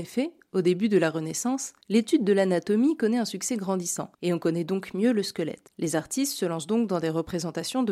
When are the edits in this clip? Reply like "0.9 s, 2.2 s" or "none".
1.8 s, 4.1 s